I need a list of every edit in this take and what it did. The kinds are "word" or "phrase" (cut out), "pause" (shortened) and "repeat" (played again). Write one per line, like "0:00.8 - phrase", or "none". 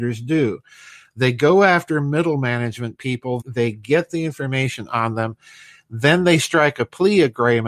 0:03.4 - word